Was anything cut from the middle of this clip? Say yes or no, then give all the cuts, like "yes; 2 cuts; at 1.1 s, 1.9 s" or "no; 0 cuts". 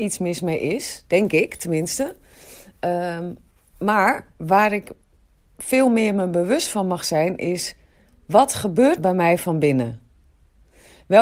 yes; 1 cut; at 9.0 s